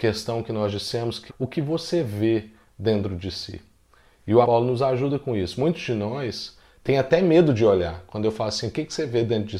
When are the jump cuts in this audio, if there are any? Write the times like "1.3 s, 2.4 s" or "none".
1.3 s, 4.4 s